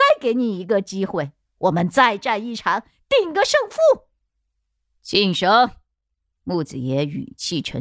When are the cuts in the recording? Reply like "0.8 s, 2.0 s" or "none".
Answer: none